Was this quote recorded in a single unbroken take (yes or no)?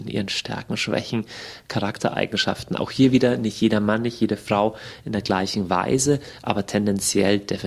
yes